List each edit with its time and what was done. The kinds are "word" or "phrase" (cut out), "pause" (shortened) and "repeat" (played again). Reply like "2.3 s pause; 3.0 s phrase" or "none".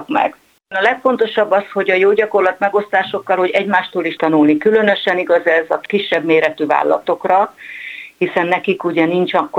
4.2 s word